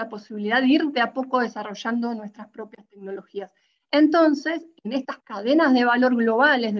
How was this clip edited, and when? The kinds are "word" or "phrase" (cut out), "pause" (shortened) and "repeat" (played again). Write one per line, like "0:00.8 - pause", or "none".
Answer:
none